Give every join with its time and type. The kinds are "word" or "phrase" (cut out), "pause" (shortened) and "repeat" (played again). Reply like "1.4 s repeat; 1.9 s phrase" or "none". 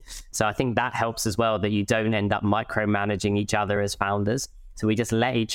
none